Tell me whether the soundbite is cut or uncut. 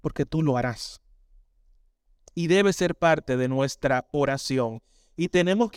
uncut